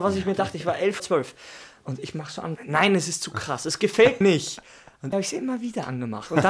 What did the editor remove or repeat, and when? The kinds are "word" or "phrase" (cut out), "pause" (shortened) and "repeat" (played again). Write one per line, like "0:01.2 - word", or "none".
0:01.0 - word
0:02.6 - word
0:04.2 - word
0:05.1 - word